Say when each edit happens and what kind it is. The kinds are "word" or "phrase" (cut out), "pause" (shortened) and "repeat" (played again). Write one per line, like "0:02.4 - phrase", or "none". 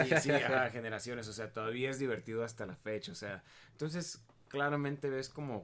none